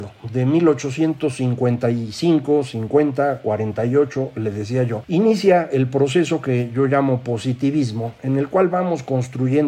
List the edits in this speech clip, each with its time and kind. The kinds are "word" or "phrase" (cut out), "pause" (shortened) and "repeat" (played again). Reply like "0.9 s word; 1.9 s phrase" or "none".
none